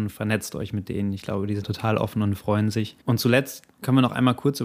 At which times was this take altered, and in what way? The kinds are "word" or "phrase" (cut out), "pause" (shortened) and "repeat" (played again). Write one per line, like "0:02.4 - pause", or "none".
0:01.6 - word
0:03.0 - pause

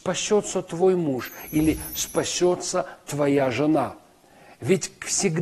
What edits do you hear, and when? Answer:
none

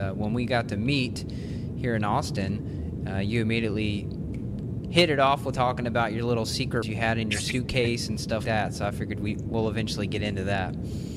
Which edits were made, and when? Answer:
0:05.5 - word
0:06.8 - word
0:08.4 - word

